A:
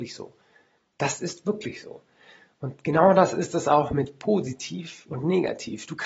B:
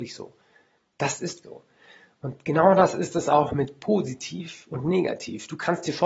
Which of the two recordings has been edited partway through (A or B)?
B